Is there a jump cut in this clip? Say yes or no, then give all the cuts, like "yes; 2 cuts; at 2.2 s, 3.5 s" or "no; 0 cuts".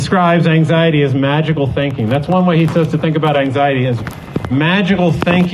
no; 0 cuts